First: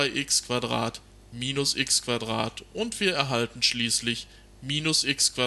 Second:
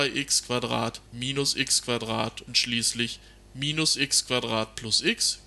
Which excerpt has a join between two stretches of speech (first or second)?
second